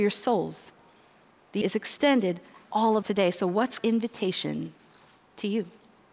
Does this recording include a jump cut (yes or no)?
yes